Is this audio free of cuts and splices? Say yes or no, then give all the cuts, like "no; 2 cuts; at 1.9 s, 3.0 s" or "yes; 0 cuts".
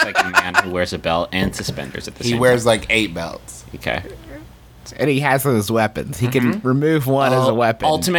yes; 0 cuts